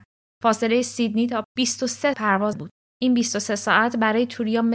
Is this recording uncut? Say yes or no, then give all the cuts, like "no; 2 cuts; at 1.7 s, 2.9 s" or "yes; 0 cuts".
no; 3 cuts; at 1.4 s, 2.1 s, 2.5 s